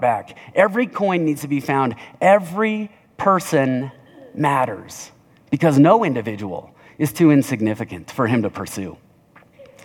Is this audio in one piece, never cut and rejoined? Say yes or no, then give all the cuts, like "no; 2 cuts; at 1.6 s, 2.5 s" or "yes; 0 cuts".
yes; 0 cuts